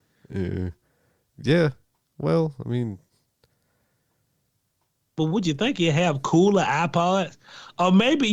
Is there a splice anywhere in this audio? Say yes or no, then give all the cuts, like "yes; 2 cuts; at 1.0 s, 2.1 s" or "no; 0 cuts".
no; 0 cuts